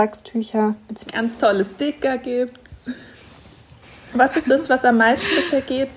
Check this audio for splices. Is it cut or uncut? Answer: uncut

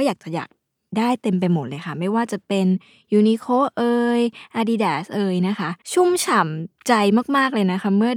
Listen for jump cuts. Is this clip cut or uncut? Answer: cut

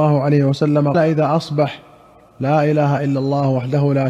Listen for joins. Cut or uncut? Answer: cut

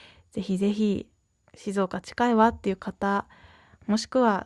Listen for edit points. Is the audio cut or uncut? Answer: uncut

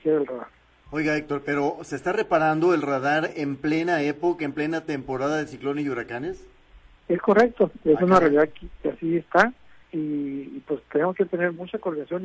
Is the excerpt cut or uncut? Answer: cut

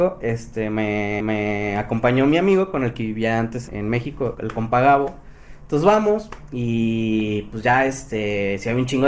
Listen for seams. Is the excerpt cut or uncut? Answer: cut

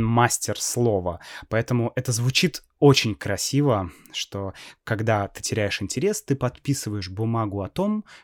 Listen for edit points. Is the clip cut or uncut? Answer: uncut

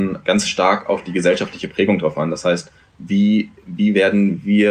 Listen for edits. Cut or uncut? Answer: uncut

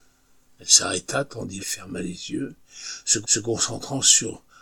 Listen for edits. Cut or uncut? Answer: cut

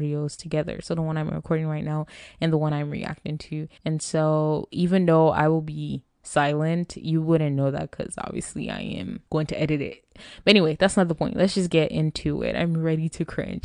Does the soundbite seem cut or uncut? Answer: cut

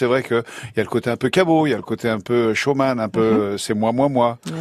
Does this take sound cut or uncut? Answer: uncut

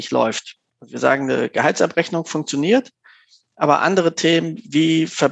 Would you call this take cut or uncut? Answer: uncut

